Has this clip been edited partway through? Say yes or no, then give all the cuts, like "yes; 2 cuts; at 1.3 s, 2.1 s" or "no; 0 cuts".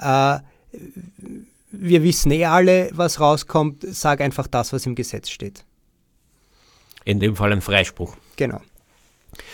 no; 0 cuts